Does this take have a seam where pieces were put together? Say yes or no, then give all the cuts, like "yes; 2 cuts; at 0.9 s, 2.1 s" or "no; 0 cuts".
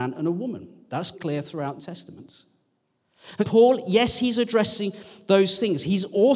yes; 3 cuts; at 1.1 s, 1.8 s, 3.4 s